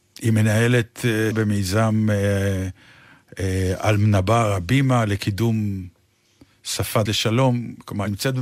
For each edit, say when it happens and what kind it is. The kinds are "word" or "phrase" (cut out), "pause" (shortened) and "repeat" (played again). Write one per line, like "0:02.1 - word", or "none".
0:01.3 - word
0:07.1 - word